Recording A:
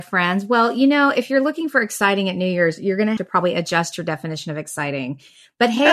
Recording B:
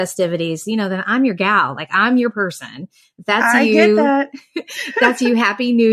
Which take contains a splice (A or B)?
A